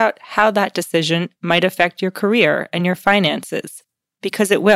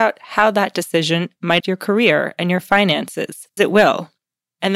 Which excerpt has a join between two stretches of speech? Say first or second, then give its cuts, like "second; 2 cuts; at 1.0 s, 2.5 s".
second; 2 cuts; at 1.6 s, 3.6 s